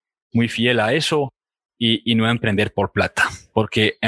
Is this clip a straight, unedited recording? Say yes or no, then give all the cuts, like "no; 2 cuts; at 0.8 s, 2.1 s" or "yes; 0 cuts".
yes; 0 cuts